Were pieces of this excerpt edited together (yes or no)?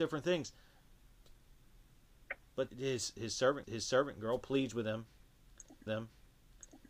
yes